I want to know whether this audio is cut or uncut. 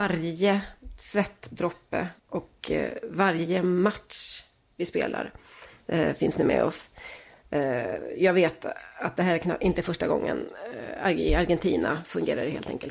cut